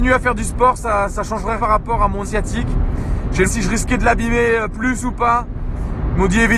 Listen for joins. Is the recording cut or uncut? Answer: cut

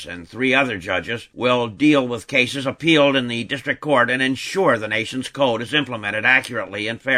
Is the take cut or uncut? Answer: uncut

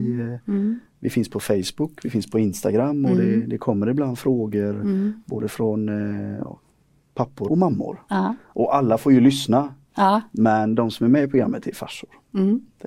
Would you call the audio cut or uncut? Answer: cut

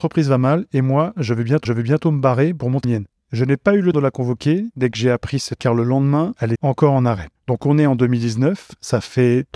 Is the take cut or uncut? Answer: cut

